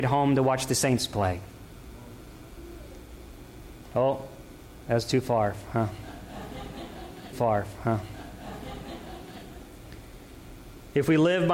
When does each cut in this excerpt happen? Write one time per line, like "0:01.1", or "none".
0:07.3